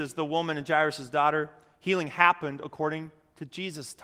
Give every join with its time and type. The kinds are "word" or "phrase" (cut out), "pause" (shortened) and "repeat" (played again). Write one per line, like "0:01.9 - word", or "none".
none